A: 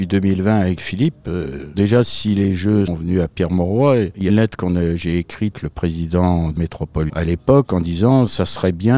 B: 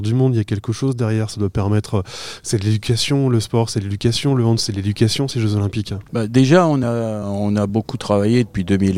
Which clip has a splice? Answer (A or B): A